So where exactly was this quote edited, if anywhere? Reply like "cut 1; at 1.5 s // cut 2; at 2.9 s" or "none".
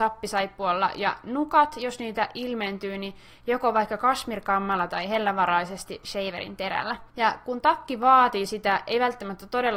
cut 1; at 7.1 s